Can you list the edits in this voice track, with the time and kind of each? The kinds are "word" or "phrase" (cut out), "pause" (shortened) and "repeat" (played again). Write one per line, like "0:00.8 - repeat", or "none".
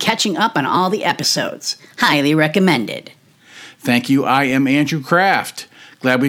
none